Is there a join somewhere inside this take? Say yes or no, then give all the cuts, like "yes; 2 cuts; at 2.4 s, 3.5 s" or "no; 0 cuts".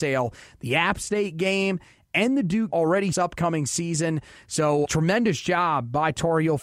yes; 3 cuts; at 2.7 s, 3.1 s, 4.8 s